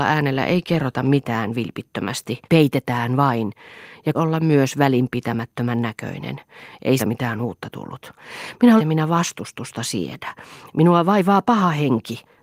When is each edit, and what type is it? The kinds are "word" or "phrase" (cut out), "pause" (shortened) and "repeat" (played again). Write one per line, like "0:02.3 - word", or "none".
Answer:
0:02.4 - pause
0:04.1 - phrase
0:07.0 - word
0:08.8 - phrase